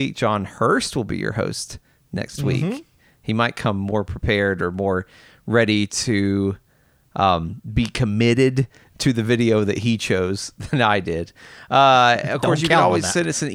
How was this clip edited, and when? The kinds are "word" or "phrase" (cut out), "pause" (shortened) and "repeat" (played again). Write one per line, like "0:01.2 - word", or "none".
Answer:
none